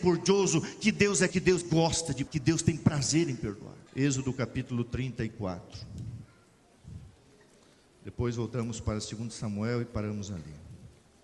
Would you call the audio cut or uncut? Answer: cut